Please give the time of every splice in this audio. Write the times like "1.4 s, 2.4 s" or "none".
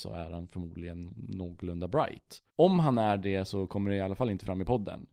2.5 s